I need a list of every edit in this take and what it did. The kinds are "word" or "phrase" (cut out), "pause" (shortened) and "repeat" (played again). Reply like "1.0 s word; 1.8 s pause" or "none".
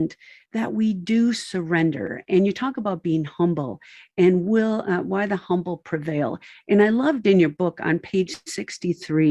none